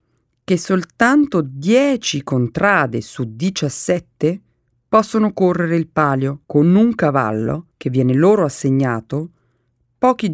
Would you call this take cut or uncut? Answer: cut